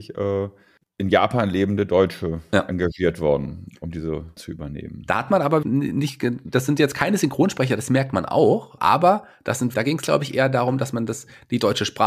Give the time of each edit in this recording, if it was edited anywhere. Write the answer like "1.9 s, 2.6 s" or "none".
4.4 s, 5.6 s, 8.8 s, 9.7 s